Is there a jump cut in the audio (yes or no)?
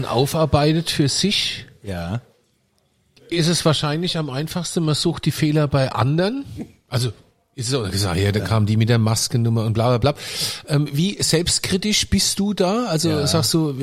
no